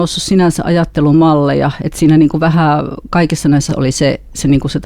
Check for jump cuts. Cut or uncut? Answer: cut